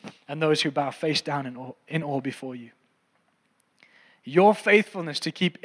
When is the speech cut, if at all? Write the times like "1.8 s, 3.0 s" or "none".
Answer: none

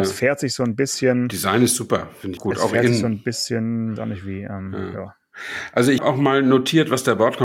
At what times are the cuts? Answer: 2.4 s, 4.0 s, 6.0 s

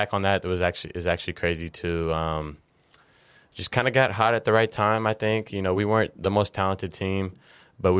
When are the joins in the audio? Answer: none

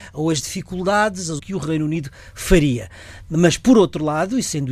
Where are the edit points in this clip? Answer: 1.4 s

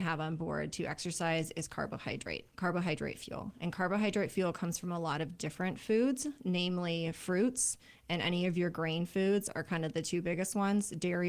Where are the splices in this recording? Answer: none

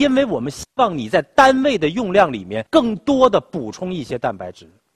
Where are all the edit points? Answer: 2.7 s

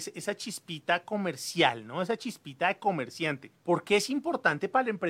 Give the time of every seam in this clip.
3.5 s

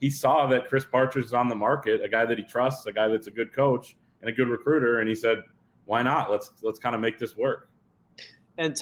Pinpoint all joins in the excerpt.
none

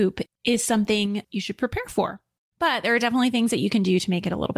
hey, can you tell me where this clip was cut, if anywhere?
1.2 s

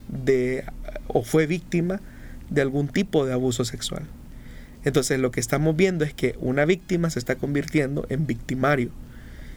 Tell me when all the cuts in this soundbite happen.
none

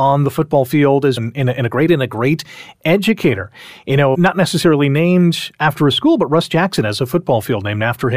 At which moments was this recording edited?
1.2 s, 1.9 s, 4.1 s

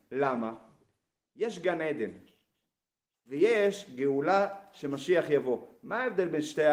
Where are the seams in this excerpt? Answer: none

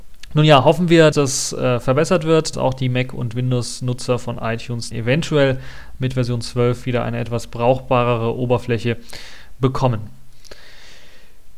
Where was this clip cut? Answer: 1.1 s, 2.5 s, 4.9 s

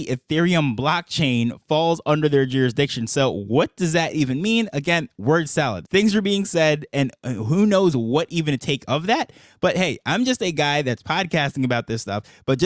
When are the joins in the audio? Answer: none

